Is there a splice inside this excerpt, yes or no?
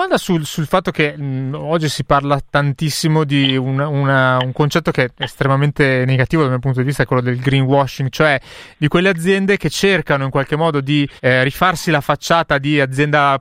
yes